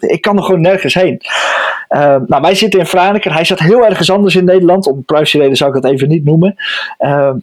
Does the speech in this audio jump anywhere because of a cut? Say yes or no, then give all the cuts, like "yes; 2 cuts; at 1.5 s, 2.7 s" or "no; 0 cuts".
no; 0 cuts